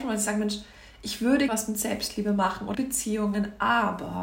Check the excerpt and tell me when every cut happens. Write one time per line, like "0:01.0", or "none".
0:01.5
0:02.7